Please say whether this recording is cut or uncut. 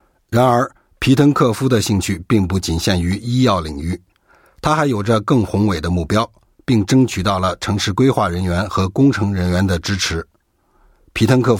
uncut